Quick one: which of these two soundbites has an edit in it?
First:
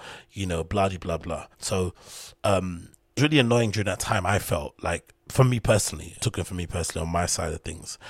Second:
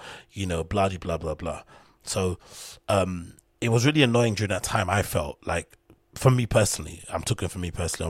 first; 5 cuts; at 1.2 s, 1.5 s, 3.2 s, 5.2 s, 6.2 s

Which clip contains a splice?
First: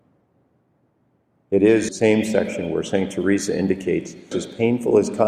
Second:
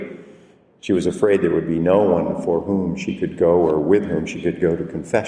first; 2 cuts; at 1.9 s, 4.3 s

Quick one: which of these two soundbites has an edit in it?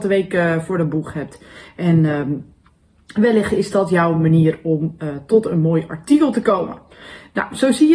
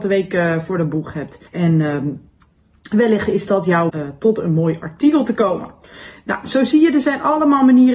second; 2 cuts; at 1.5 s, 3.9 s

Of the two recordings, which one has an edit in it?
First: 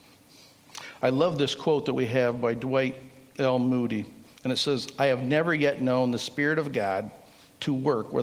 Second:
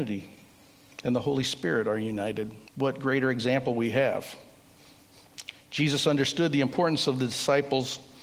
second; 1 cut; at 2.7 s

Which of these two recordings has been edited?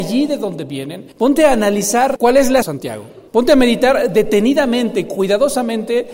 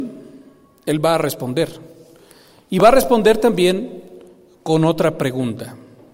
first; 4 cuts; at 1.1 s, 2.2 s, 2.6 s, 3.3 s

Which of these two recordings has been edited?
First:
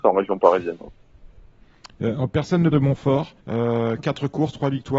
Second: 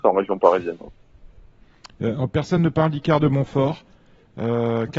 first; 2 cuts; at 2.7 s, 3.4 s

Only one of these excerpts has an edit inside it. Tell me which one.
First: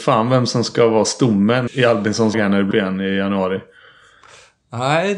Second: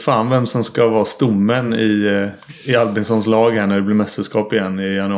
first; 3 cuts; at 1.7 s, 2.3 s, 2.7 s

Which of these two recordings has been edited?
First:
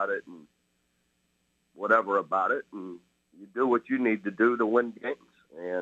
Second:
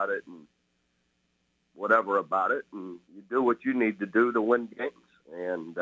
second; 1 cut; at 3.0 s

